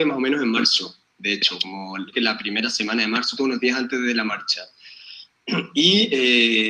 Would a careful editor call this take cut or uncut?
cut